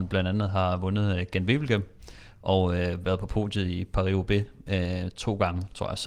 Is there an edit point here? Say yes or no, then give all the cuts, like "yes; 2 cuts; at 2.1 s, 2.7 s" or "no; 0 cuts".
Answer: no; 0 cuts